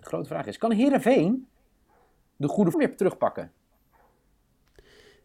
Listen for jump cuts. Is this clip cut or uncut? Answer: cut